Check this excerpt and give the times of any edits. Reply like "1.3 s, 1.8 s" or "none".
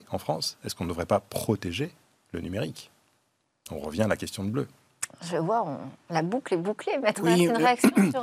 none